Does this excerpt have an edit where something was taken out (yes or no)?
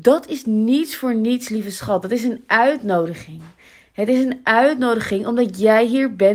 no